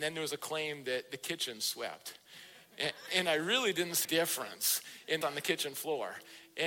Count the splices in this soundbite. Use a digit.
3